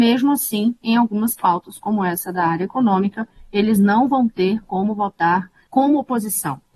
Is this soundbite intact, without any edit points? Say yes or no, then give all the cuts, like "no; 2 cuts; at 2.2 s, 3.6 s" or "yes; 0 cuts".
yes; 0 cuts